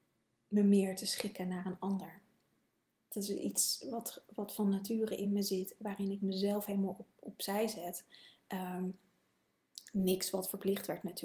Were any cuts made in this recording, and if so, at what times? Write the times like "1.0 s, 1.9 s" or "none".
none